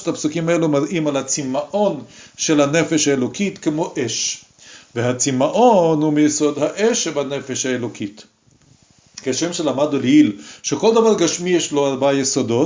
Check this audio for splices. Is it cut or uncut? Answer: uncut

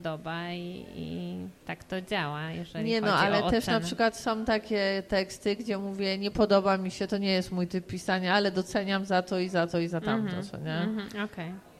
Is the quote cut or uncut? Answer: uncut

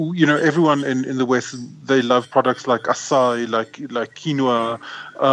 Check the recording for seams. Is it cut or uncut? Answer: uncut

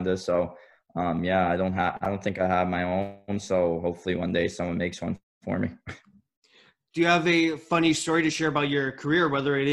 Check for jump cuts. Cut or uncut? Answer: uncut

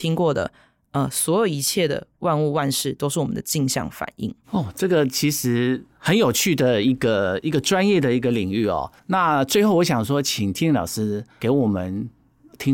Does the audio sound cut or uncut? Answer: cut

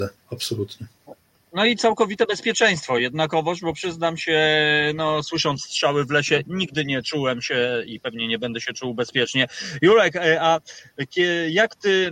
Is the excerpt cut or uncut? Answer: uncut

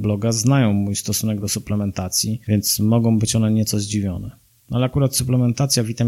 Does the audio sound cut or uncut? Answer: uncut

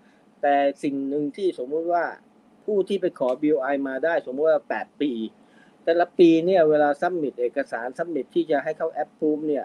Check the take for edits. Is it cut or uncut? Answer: uncut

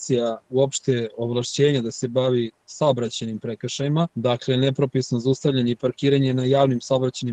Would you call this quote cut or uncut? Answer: cut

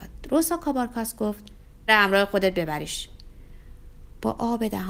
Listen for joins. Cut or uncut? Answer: cut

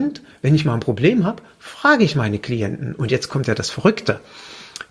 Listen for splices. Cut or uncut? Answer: uncut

